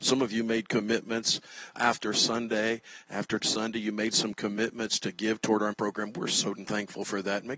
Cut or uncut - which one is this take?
cut